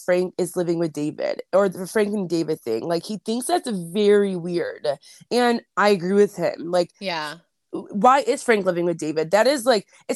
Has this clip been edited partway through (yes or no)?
no